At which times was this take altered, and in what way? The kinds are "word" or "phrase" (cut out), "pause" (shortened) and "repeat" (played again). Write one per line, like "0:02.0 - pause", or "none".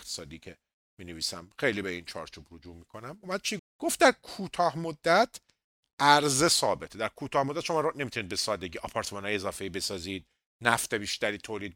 0:03.6 - word